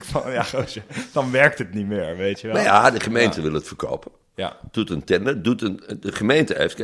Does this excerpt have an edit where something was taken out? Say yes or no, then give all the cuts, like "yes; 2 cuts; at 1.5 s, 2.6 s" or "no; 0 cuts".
no; 0 cuts